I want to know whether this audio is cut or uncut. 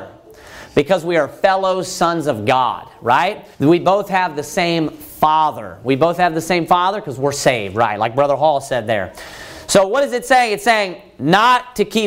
cut